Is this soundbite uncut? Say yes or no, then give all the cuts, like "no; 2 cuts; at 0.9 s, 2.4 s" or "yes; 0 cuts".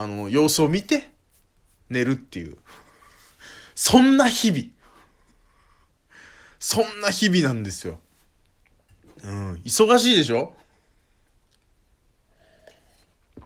yes; 0 cuts